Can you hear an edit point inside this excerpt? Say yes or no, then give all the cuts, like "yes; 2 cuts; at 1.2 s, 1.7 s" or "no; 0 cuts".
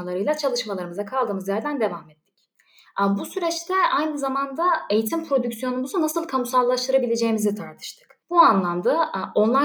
yes; 1 cut; at 8.2 s